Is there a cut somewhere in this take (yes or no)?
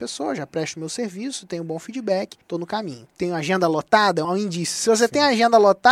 yes